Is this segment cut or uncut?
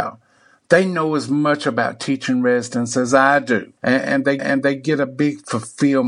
cut